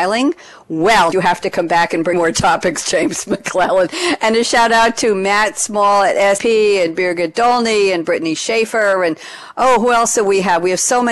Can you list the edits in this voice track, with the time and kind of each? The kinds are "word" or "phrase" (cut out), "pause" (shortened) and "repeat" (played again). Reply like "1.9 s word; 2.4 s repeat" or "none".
1.1 s phrase; 2.1 s word; 6.4 s word

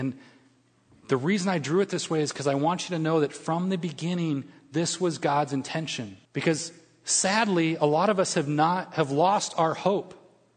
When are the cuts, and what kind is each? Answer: 6.2 s pause

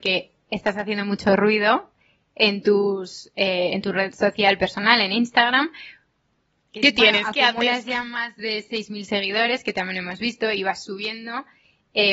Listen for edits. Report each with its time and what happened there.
none

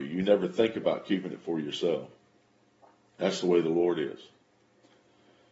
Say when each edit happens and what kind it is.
none

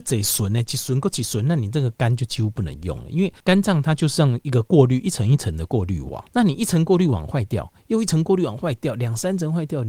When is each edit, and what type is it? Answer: 3.4 s pause; 6.3 s pause

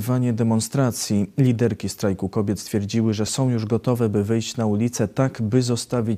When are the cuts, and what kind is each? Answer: none

